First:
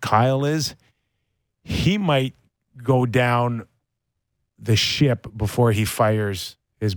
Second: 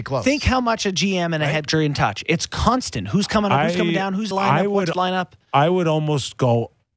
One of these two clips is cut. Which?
second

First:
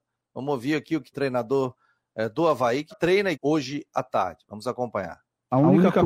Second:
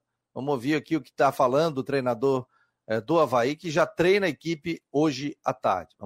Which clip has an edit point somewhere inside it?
first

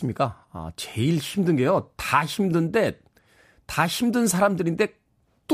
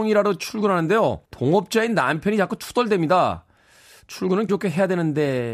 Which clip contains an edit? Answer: second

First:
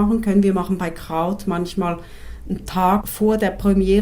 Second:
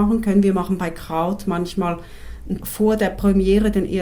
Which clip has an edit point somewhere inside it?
second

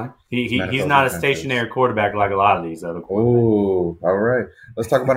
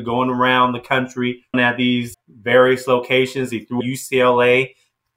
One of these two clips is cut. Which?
second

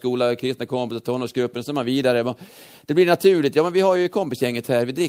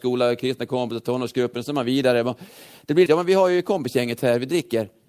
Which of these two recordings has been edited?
second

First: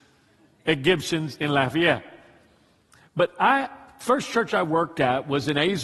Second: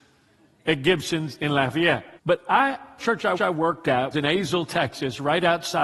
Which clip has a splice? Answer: second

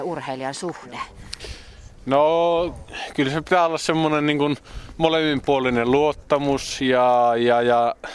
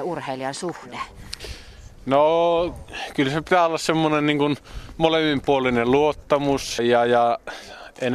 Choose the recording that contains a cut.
second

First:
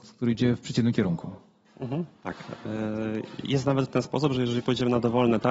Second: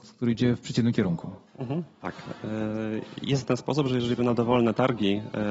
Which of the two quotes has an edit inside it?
second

